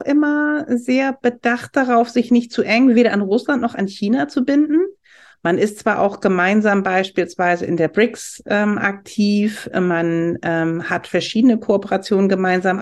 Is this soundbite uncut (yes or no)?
yes